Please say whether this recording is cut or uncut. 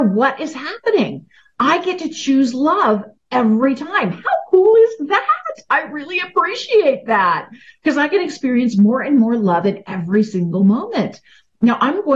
uncut